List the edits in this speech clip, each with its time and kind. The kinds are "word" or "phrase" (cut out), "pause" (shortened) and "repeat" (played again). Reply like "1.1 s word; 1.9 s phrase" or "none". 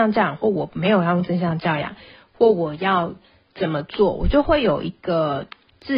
none